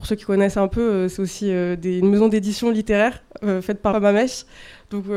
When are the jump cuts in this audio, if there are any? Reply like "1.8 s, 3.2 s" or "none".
3.9 s